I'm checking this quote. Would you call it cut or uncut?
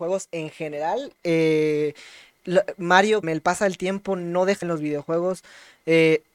cut